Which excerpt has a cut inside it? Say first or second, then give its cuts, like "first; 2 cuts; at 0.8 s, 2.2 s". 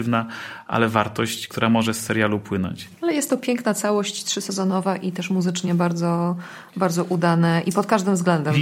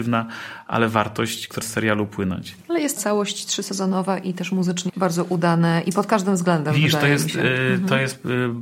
second; 3 cuts; at 1.6 s, 3.0 s, 4.9 s